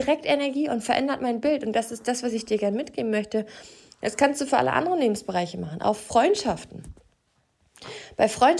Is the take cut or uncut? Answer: uncut